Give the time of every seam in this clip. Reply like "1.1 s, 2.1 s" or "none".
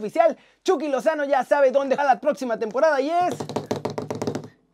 2.0 s